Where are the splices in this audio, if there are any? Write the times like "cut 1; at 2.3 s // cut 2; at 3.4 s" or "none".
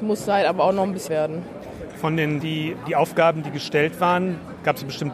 cut 1; at 1.1 s // cut 2; at 2.4 s // cut 3; at 2.8 s